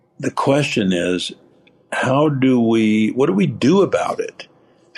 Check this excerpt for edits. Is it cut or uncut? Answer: uncut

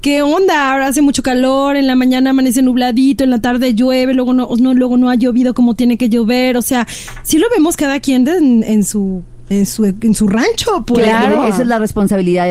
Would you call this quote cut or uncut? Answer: uncut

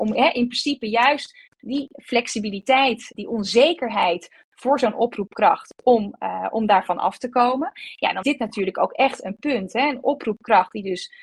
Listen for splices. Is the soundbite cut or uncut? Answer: cut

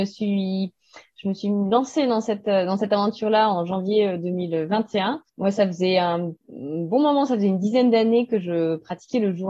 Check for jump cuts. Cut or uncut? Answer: cut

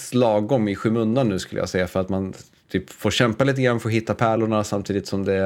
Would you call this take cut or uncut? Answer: uncut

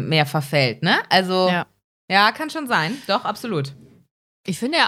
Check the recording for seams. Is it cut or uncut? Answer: uncut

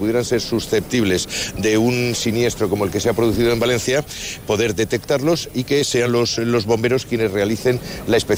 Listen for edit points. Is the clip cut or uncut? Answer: uncut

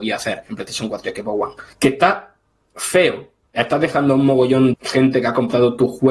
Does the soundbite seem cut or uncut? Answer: cut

